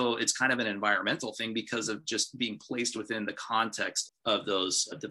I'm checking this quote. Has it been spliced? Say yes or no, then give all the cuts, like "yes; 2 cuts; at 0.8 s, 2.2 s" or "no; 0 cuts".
yes; 1 cut; at 4.1 s